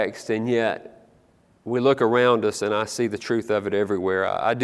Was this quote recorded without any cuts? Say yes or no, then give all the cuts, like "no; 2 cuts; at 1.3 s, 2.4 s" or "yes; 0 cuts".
yes; 0 cuts